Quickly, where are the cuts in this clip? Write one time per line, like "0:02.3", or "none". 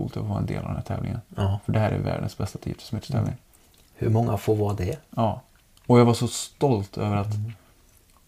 none